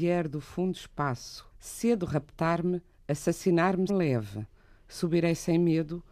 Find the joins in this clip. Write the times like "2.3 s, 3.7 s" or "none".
1.5 s, 3.9 s